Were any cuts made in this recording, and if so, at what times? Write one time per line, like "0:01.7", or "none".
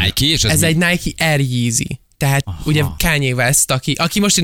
0:02.4
0:03.0